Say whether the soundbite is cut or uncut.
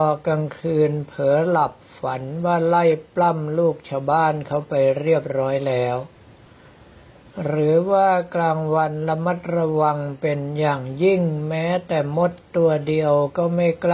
uncut